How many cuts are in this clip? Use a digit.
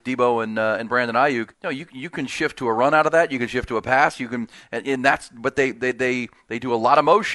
1